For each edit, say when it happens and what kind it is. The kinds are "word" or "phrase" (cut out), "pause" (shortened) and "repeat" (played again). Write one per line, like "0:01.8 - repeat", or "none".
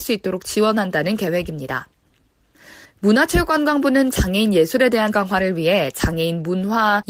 0:02.8 - pause
0:05.1 - phrase